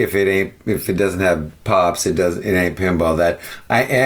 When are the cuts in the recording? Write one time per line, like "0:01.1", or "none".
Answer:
none